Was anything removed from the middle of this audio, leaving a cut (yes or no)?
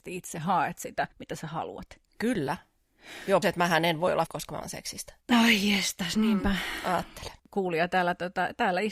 yes